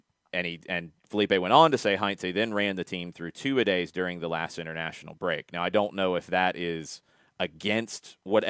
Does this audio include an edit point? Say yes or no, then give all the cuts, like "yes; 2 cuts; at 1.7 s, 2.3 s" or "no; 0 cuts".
no; 0 cuts